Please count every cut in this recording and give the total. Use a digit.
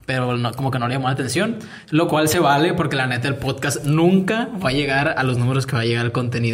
0